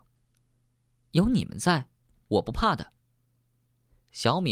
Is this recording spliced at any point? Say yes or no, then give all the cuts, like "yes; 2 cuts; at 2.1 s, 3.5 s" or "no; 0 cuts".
yes; 1 cut; at 3.0 s